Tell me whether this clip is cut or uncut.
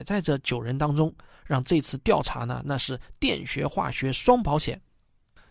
uncut